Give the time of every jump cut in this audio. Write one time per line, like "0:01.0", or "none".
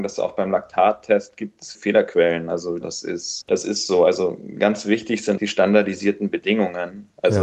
0:01.7
0:02.8
0:03.4
0:05.4